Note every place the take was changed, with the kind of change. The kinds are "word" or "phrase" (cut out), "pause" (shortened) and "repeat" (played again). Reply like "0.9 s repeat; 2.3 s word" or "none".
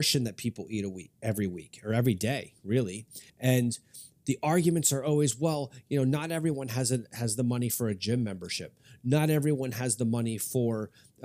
3.3 s pause